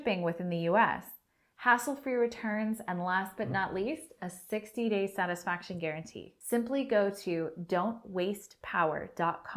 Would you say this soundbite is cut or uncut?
uncut